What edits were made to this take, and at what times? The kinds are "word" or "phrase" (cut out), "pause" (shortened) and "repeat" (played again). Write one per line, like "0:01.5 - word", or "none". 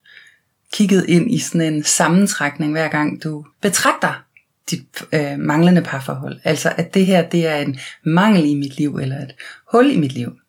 0:03.5 - pause